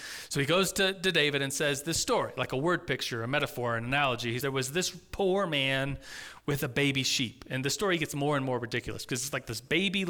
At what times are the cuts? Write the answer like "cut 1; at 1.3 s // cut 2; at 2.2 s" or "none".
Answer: cut 1; at 4.4 s